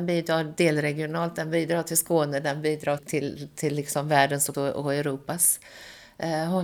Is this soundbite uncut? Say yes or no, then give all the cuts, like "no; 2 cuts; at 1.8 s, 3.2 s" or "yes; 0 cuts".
no; 2 cuts; at 3.0 s, 4.5 s